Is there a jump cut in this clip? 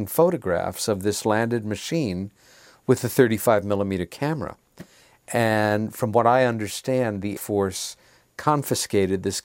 yes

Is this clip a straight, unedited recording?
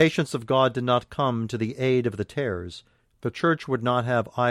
yes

